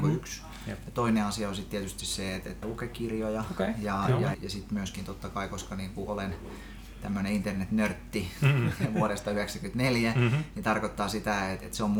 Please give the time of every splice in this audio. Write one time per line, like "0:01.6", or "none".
0:02.6
0:04.3

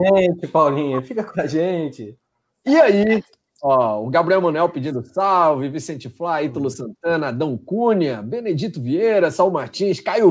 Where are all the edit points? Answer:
none

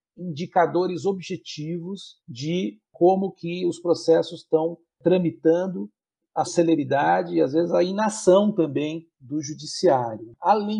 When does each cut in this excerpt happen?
0:02.2
0:06.5
0:09.1

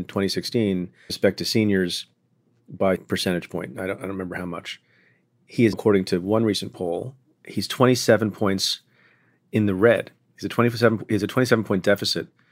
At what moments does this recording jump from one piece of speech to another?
0:01.1
0:03.0
0:05.7

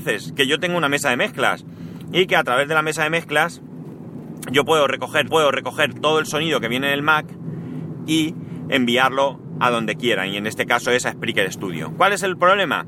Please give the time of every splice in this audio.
0:05.3

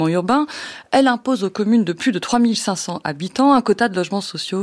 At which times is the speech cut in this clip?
none

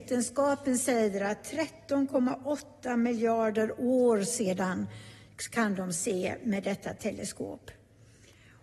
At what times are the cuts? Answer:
none

